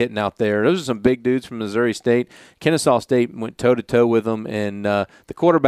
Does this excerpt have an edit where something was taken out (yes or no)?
no